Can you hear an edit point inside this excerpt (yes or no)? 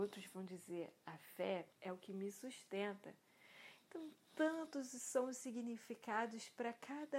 yes